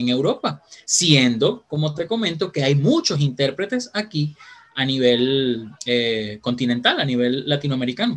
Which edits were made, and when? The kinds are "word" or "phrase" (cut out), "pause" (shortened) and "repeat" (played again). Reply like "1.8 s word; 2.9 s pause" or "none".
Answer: 5.8 s pause